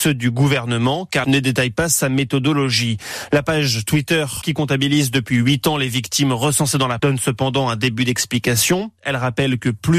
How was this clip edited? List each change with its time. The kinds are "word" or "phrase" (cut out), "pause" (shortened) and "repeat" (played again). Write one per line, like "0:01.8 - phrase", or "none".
0:01.2 - word
0:04.4 - word
0:07.0 - word